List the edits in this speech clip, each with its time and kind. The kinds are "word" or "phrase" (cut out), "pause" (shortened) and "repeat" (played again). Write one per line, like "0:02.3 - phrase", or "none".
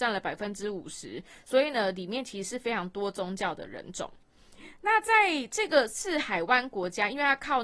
none